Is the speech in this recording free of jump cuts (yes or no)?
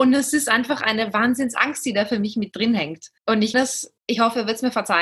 no